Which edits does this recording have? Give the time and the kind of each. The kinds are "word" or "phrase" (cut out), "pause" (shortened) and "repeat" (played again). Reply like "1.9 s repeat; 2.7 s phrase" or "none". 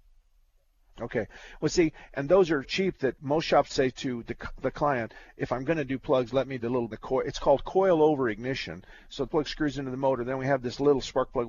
2.6 s word; 3.2 s word; 3.7 s word; 6.6 s word; 6.9 s phrase; 9.3 s phrase